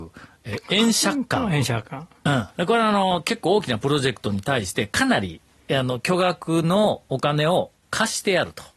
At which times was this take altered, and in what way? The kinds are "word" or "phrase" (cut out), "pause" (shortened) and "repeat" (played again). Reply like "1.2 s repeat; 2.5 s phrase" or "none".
2.5 s pause